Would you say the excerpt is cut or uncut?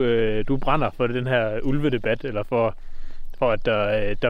uncut